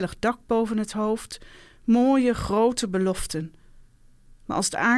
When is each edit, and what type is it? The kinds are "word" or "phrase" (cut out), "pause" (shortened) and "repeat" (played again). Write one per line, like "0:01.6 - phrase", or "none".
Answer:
none